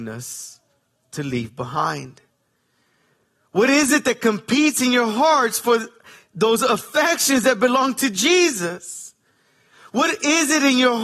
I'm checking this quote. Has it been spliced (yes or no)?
no